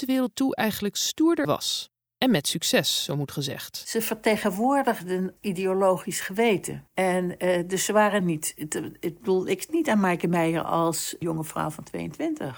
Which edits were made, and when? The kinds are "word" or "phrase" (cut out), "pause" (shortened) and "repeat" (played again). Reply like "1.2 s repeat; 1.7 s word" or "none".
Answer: 1.4 s phrase; 2.1 s pause; 5.4 s word; 6.9 s pause; 8.2 s phrase; 9.7 s word